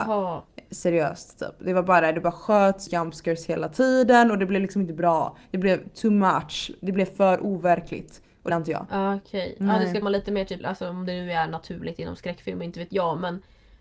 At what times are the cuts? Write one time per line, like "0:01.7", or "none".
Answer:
0:02.9
0:08.5
0:10.0
0:10.6